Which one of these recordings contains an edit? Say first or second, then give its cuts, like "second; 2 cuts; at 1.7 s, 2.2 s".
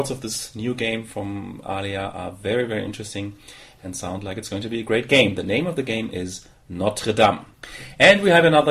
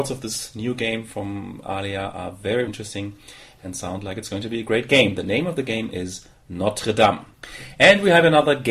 second; 1 cut; at 2.7 s